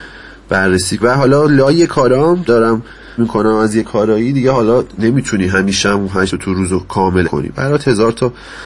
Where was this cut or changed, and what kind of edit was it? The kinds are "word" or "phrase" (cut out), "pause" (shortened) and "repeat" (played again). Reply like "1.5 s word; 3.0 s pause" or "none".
1.0 s word; 2.5 s word; 3.2 s word; 6.3 s word; 7.2 s word